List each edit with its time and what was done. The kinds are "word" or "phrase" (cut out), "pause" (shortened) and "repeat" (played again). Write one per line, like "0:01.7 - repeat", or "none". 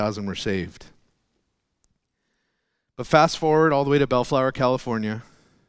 none